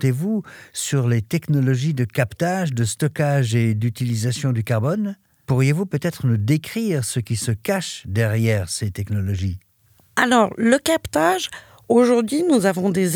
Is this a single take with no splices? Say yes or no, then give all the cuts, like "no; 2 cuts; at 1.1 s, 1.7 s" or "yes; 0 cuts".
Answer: yes; 0 cuts